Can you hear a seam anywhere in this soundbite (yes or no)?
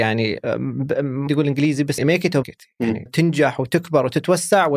yes